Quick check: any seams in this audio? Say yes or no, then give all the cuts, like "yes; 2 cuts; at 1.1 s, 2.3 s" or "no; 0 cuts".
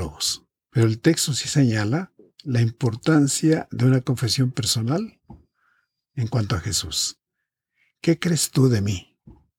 no; 0 cuts